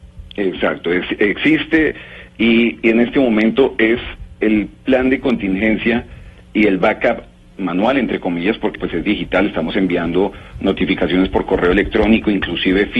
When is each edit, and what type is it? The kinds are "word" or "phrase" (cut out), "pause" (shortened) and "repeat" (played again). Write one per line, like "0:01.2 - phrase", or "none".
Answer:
0:02.8 - word
0:08.7 - word